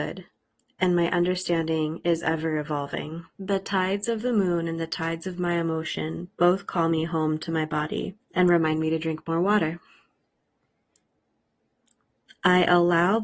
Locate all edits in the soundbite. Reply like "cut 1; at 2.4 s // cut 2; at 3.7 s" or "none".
cut 1; at 3.3 s // cut 2; at 8.2 s